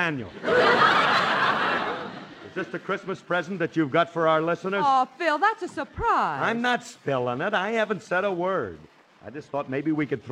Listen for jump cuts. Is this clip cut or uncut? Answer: uncut